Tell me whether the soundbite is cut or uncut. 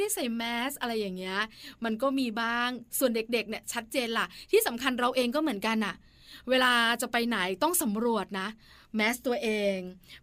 uncut